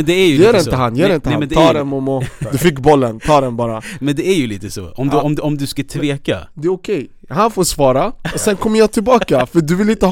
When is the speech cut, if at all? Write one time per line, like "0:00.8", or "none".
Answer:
none